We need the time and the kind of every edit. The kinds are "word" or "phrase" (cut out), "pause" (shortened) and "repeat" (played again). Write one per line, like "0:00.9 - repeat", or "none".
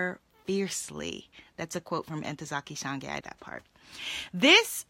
0:03.2 - phrase